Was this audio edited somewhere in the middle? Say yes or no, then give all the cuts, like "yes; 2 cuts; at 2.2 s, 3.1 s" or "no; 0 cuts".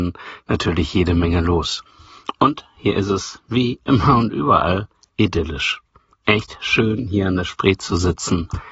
no; 0 cuts